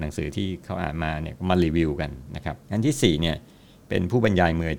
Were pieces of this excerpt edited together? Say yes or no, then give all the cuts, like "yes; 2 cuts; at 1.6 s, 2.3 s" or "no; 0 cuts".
yes; 1 cut; at 2.6 s